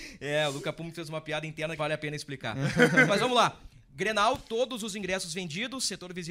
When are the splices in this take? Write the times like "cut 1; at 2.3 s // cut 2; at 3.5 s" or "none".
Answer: cut 1; at 1.8 s